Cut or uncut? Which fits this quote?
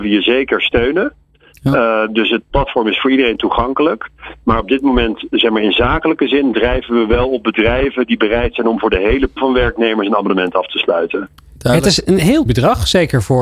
cut